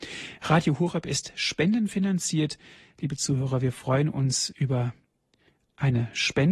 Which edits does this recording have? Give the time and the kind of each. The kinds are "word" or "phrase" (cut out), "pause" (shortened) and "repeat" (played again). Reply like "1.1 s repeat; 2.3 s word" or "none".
none